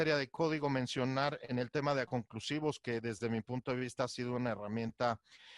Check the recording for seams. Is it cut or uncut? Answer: cut